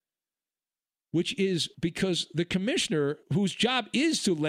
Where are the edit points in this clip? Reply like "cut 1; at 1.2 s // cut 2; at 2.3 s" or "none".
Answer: cut 1; at 1.7 s // cut 2; at 3.2 s